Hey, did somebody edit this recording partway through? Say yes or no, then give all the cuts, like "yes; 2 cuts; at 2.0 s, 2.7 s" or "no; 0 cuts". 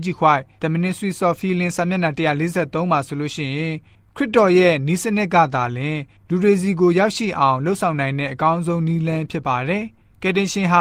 no; 0 cuts